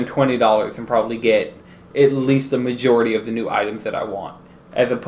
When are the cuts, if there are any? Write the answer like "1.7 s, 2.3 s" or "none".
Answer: none